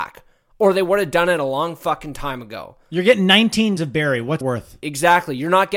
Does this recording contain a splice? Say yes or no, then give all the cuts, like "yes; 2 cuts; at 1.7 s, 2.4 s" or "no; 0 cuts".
yes; 2 cuts; at 3.8 s, 4.4 s